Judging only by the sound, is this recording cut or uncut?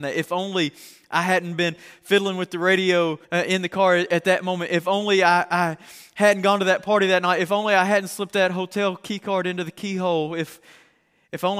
cut